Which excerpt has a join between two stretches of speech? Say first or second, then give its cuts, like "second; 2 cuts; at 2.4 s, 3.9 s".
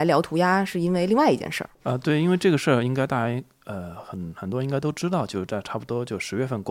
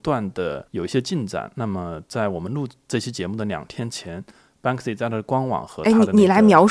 first; 1 cut; at 1.7 s